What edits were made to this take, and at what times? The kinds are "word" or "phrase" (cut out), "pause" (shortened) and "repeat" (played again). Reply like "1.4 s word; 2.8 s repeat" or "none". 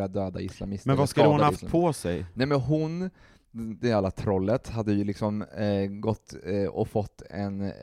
none